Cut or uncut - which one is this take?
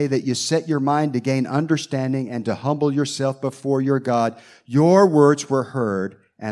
uncut